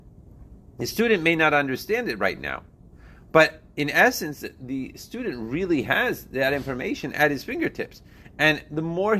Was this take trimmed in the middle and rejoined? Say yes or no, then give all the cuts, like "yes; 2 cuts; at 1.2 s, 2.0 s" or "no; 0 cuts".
no; 0 cuts